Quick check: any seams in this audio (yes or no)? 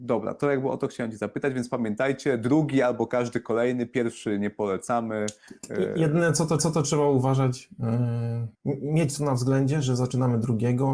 yes